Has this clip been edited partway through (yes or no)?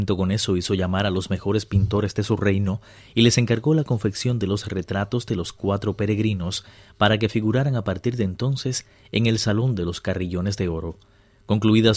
no